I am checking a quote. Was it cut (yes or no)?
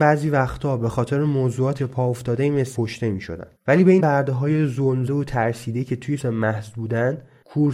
yes